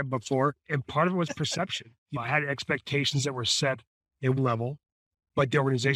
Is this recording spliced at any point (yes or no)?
yes